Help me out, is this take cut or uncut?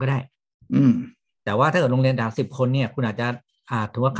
uncut